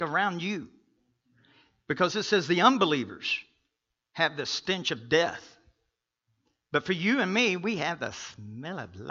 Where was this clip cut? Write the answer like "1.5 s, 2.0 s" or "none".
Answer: none